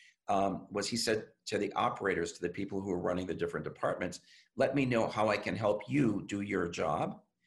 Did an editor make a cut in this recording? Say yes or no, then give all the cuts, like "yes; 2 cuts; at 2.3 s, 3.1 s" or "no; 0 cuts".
no; 0 cuts